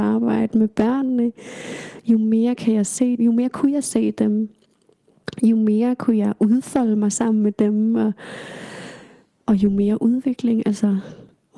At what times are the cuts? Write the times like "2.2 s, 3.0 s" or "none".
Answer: 3.2 s